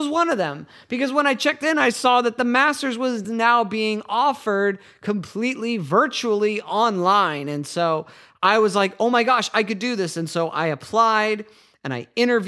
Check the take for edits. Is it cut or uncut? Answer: uncut